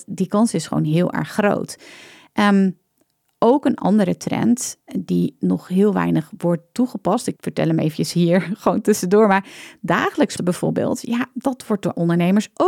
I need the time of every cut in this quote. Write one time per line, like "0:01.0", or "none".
0:07.4
0:10.4